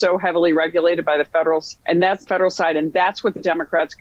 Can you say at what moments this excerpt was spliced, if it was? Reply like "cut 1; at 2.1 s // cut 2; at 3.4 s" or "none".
cut 1; at 1.8 s // cut 2; at 2.3 s